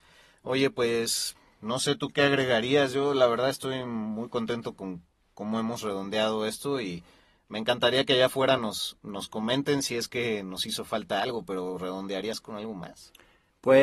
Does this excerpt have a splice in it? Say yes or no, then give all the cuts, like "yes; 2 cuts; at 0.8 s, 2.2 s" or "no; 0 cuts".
no; 0 cuts